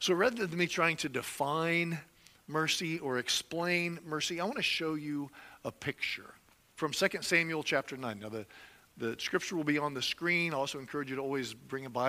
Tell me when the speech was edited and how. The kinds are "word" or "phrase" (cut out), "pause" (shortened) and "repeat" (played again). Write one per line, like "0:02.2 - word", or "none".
none

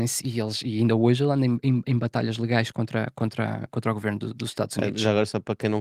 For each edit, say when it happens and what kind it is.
none

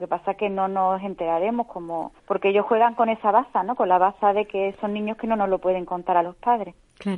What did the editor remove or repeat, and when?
0:02.1 - pause

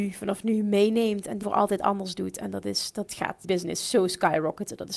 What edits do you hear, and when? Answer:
0:01.4 - word
0:03.4 - word

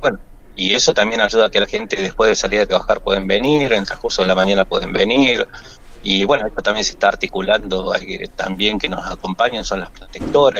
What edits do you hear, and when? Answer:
none

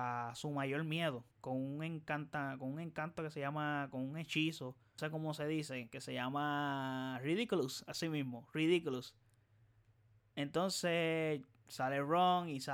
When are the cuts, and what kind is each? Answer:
0:01.3 - pause
0:05.0 - word

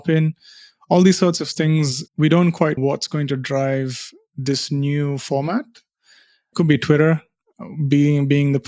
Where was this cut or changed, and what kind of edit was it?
0:02.1 - pause
0:02.8 - word

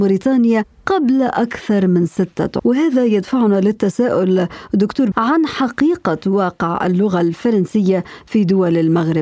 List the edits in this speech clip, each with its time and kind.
0:02.6 - word
0:05.1 - word

